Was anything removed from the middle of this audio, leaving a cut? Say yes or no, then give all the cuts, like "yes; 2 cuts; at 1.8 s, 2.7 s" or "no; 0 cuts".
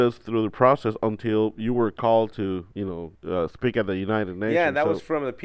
yes; 2 cuts; at 2.7 s, 3.1 s